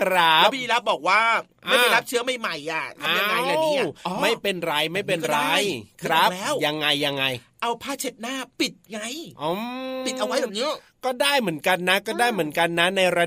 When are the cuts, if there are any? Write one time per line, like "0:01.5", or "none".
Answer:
0:08.5